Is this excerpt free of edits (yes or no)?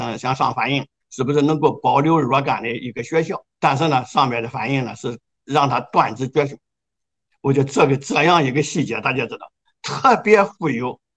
no